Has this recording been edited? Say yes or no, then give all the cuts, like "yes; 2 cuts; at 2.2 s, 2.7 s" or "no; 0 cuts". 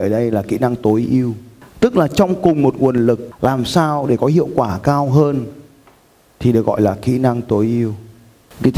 no; 0 cuts